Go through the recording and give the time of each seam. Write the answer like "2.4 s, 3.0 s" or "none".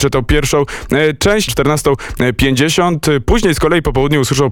1.5 s